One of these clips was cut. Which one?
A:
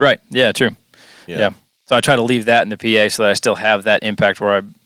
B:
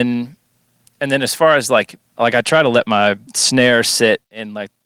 B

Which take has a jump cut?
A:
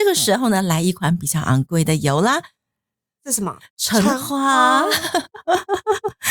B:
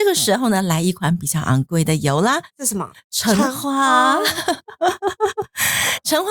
B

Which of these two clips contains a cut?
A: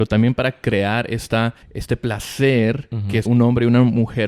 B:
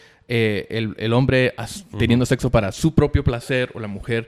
A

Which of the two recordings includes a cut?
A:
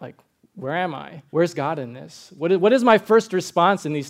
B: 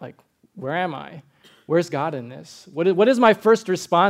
A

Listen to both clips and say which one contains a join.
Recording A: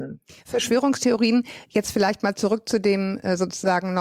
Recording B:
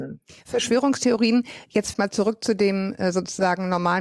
B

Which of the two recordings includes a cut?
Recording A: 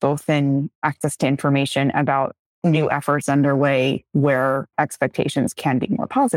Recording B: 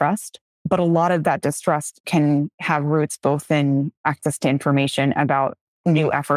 A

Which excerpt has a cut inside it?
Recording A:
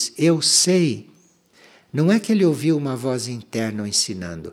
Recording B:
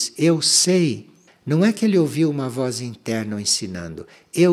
B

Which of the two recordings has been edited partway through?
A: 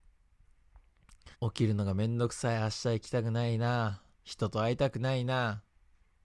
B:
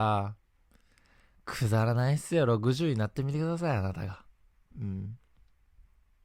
A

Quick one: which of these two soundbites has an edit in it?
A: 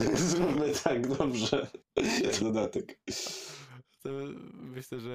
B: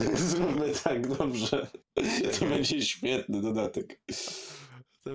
A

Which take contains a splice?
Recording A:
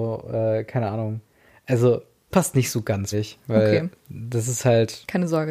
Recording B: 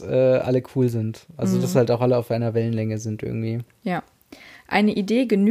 A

